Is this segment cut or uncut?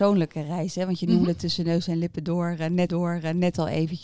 cut